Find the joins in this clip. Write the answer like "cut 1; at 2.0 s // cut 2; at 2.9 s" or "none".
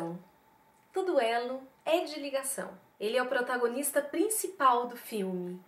cut 1; at 1.7 s // cut 2; at 2.9 s